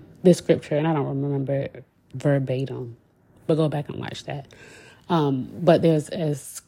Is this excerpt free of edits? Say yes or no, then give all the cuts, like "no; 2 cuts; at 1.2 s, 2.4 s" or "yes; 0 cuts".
yes; 0 cuts